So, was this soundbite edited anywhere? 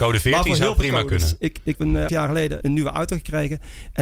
yes; 3 cuts; at 1.7 s, 2.1 s, 2.6 s

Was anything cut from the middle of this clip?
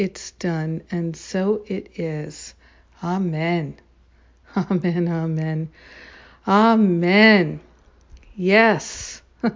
no; 0 cuts

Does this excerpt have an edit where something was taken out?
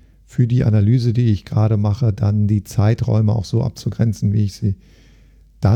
no; 0 cuts

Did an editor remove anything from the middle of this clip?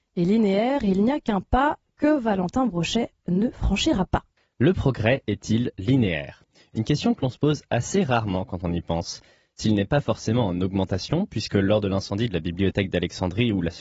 no; 0 cuts

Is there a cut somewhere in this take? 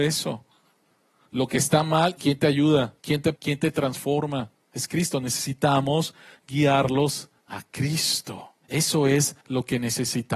yes; 7 cuts; at 2.2 s, 3.0 s, 3.4 s, 4.6 s, 7.4 s, 8.6 s, 9.4 s

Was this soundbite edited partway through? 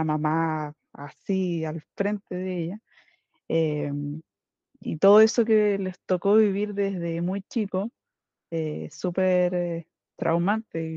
no; 0 cuts

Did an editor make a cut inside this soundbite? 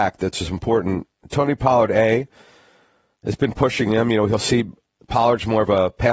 no; 0 cuts

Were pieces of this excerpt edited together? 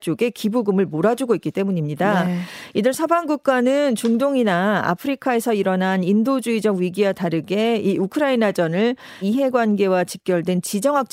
yes; 1 cut; at 9.2 s

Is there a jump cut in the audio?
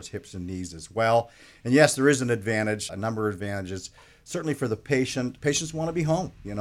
yes; 2 cuts; at 2.9 s, 5.4 s

